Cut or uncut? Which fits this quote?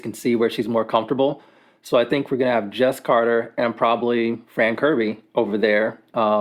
uncut